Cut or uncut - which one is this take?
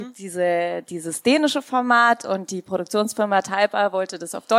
uncut